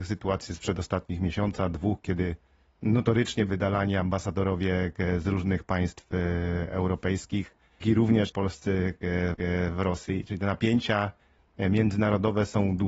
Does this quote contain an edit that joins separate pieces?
yes; 4 cuts; at 3.5 s, 7.8 s, 8.3 s, 9.3 s

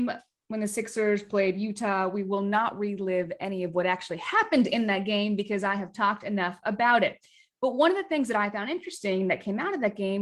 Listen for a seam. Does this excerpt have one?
no; 0 cuts

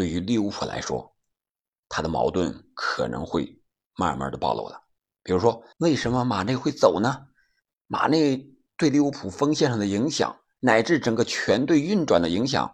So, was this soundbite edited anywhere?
yes; 1 cut; at 5.7 s

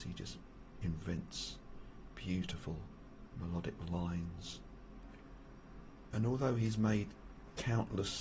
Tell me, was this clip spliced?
no; 0 cuts

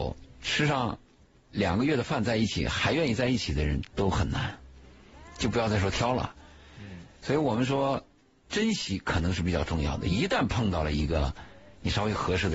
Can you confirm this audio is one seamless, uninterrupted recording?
yes; 0 cuts

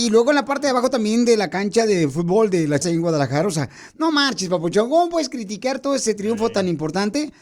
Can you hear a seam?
yes; 1 cut; at 2.8 s

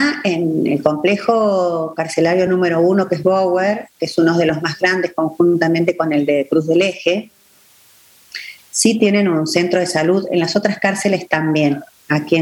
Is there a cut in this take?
no; 0 cuts

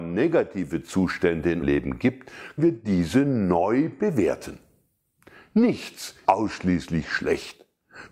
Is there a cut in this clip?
yes; 3 cuts; at 1.6 s, 2.6 s, 6.2 s

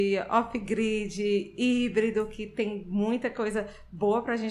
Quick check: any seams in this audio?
no; 0 cuts

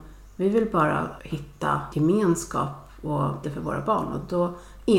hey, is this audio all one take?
no; 1 cut; at 3.4 s

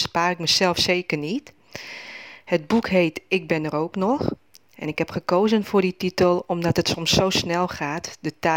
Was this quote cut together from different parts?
no; 0 cuts

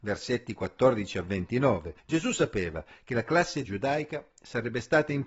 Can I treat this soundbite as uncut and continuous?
no; 2 cuts; at 2.0 s, 3.6 s

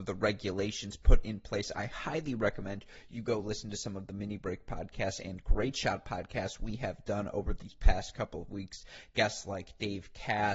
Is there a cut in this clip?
no; 0 cuts

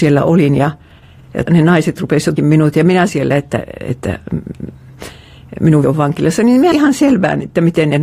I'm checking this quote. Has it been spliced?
yes; 5 cuts; at 1.5 s, 2.4 s, 3.1 s, 5.8 s, 6.7 s

